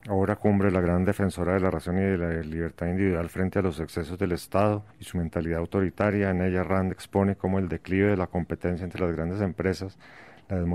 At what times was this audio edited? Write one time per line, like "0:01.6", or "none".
0:04.9